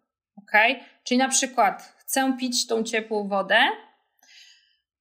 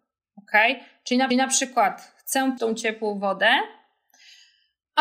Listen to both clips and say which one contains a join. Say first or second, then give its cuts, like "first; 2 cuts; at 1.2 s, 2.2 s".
second; 2 cuts; at 1.3 s, 2.6 s